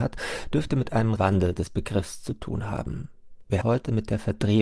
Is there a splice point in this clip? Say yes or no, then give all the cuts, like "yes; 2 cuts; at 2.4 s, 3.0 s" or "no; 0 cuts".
yes; 2 cuts; at 1.2 s, 3.6 s